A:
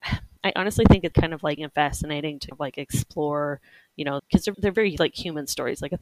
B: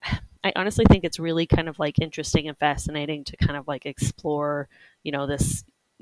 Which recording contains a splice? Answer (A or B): A